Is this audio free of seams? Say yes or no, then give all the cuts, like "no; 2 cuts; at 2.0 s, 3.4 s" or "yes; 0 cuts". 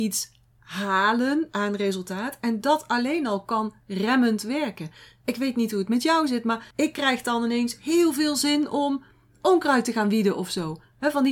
no; 1 cut; at 6.7 s